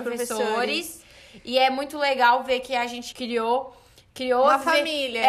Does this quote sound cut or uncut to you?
cut